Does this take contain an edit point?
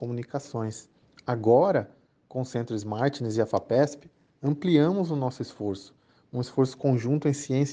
no; 0 cuts

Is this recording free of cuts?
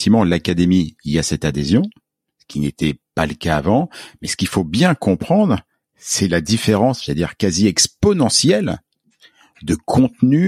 yes; 0 cuts

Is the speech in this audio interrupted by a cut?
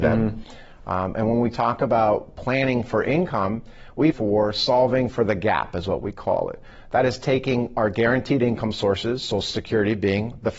yes; 1 cut; at 4.1 s

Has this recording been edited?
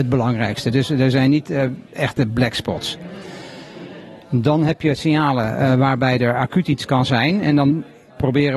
no; 0 cuts

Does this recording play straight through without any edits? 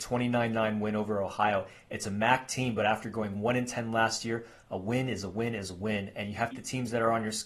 no; 1 cut; at 6.5 s

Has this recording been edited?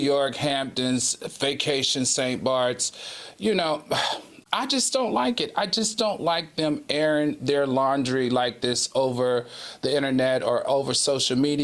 yes; 1 cut; at 4.5 s

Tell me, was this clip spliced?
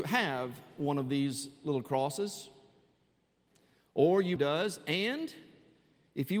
yes; 1 cut; at 4.4 s

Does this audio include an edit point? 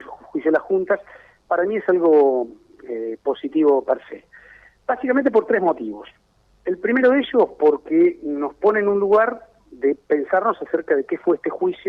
no; 0 cuts

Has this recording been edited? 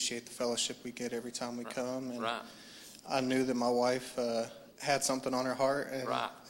yes; 1 cut; at 4.7 s

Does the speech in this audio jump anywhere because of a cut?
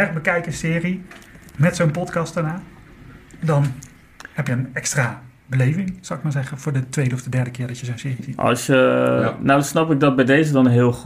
yes; 1 cut; at 4.5 s

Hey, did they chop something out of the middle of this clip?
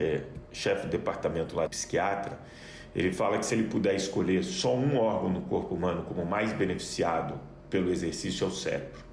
yes; 1 cut; at 1.7 s

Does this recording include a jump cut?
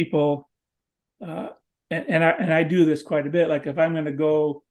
no; 0 cuts

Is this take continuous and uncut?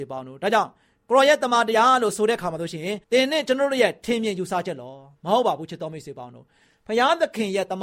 no; 1 cut; at 3.0 s

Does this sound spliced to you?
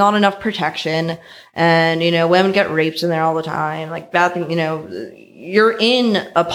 no; 0 cuts

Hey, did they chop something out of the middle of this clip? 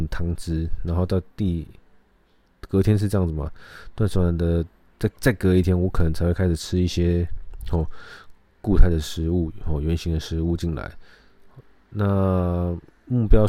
no; 0 cuts

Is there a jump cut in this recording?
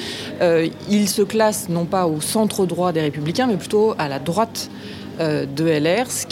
no; 0 cuts

